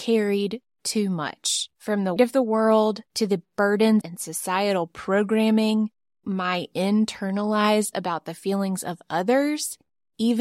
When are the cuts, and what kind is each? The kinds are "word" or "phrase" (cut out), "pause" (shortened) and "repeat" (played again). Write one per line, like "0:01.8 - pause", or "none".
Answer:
0:01.7 - pause
0:02.2 - word
0:03.1 - pause
0:04.0 - phrase
0:06.2 - word
0:07.9 - word